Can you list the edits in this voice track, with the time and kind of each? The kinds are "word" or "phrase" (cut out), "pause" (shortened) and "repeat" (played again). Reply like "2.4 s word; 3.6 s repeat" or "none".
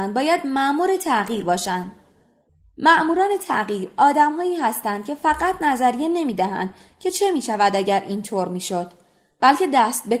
none